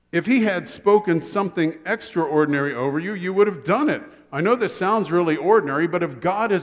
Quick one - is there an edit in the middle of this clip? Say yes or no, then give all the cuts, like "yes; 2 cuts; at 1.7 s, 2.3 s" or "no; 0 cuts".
no; 0 cuts